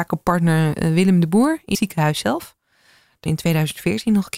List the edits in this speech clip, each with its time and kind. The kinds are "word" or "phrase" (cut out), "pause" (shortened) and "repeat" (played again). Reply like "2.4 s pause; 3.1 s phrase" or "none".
1.7 s word; 3.3 s phrase